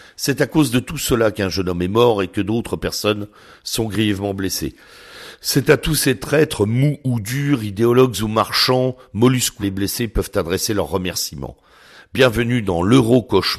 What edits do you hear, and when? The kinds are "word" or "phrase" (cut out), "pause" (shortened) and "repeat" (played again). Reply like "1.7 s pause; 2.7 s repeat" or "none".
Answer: 9.6 s phrase

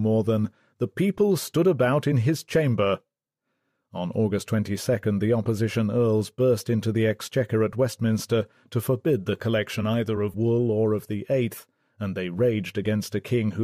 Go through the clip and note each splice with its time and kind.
none

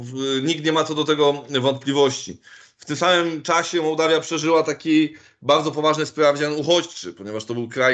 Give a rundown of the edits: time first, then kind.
none

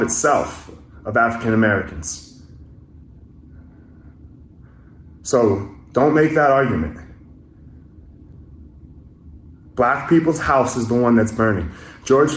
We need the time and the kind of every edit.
none

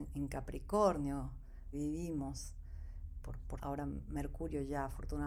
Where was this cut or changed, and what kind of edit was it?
1.7 s word; 3.2 s word; 3.6 s word

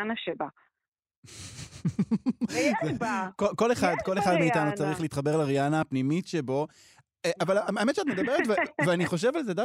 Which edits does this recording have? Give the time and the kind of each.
none

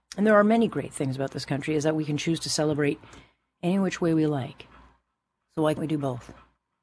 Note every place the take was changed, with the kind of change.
5.8 s word

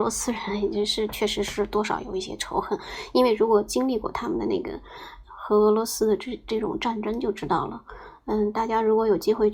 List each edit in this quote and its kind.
5.2 s word

